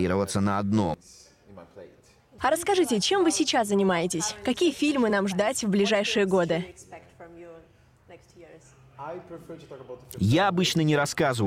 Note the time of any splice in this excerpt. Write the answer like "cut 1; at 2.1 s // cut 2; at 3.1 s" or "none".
none